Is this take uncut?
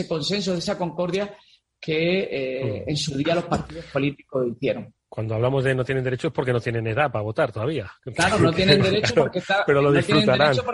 yes; 0 cuts

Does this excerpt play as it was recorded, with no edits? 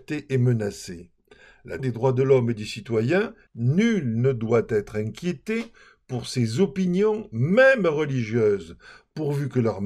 no; 2 cuts; at 1.8 s, 3.5 s

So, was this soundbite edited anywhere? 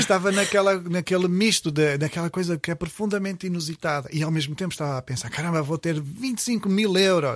no; 0 cuts

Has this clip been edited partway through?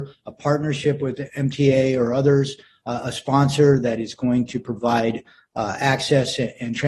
no; 0 cuts

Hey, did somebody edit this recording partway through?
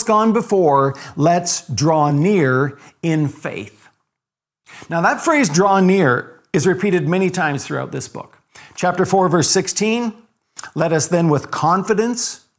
no; 0 cuts

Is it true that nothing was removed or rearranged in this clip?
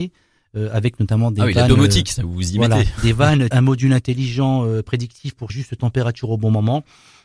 no; 2 cuts; at 3.5 s, 5.5 s

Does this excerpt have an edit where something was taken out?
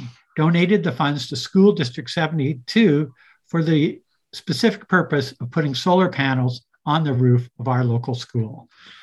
no; 0 cuts

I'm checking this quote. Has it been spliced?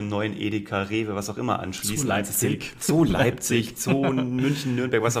no; 0 cuts

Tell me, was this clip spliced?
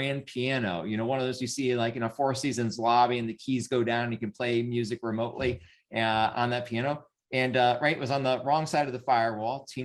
no; 0 cuts

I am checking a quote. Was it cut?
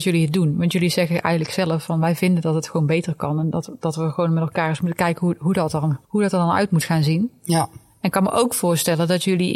yes; 1 cut; at 6.0 s

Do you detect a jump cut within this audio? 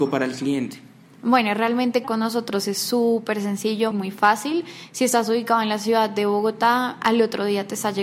yes; 2 cuts; at 2.0 s, 3.9 s

